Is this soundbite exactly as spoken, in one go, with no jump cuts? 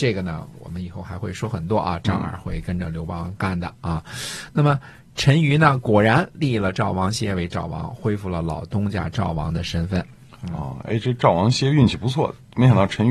yes; 0 cuts

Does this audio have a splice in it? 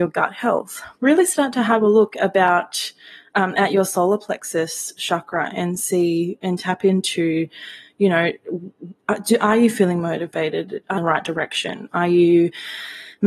yes; 2 cuts; at 1.0 s, 11.0 s

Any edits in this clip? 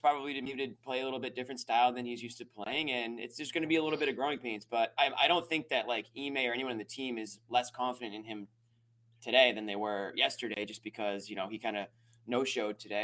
no; 0 cuts

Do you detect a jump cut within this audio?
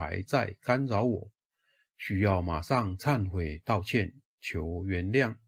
no; 0 cuts

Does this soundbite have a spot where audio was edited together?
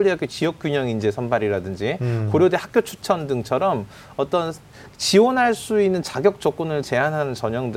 no; 0 cuts

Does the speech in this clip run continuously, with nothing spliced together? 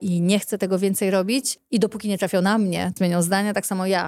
no; 1 cut; at 3.0 s

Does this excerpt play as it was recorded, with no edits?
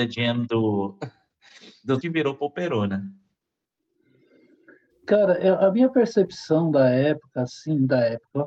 no; 1 cut; at 2.0 s

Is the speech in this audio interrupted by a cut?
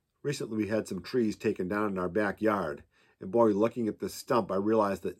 no; 0 cuts

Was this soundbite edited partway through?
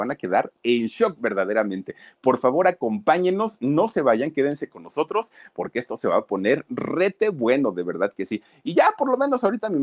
no; 0 cuts

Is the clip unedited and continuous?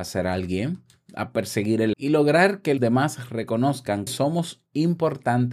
no; 3 cuts; at 1.9 s, 2.8 s, 4.1 s

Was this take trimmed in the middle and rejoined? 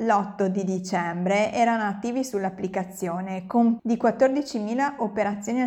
yes; 1 cut; at 3.8 s

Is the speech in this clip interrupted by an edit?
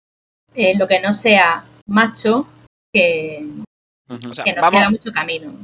no; 0 cuts

